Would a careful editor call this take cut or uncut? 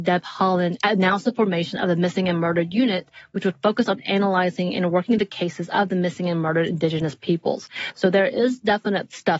uncut